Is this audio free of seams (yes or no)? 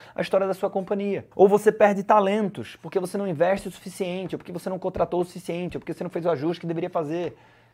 no